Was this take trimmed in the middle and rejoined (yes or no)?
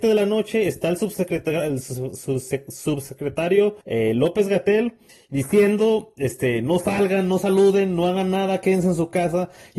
yes